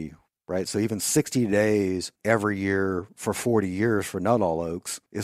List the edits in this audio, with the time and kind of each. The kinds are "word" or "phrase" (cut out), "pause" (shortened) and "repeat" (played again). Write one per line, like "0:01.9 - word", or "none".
none